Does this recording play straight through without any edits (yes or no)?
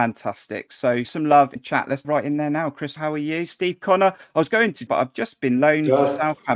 no